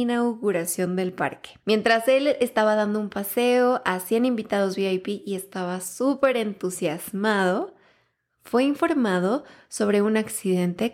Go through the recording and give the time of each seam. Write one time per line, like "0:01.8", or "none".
0:01.6